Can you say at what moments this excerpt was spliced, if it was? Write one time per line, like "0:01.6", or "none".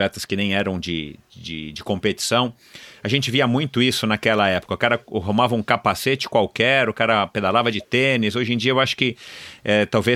none